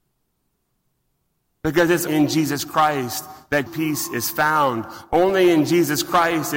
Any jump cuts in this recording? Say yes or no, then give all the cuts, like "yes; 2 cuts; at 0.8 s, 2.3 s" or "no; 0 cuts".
yes; 2 cuts; at 2.1 s, 3.7 s